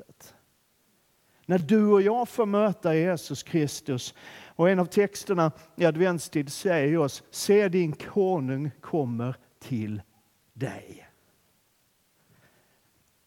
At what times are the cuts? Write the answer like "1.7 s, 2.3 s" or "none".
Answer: none